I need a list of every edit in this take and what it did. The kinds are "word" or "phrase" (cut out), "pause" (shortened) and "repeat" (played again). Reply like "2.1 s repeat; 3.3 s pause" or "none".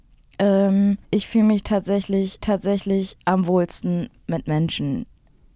1.0 s pause; 2.4 s repeat

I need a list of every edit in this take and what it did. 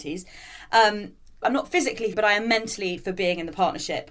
1.4 s word; 2.1 s word; 3.0 s phrase

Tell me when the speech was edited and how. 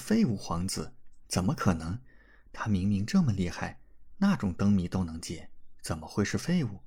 none

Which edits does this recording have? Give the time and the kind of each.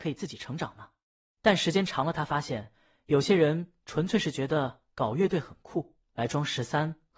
none

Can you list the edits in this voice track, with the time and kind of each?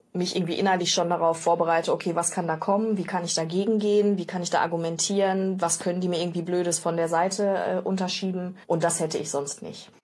8.6 s pause

